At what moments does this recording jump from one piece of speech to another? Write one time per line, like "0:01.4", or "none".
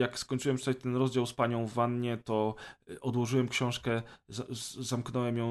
none